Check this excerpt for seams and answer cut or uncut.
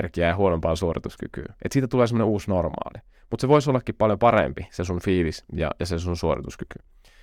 uncut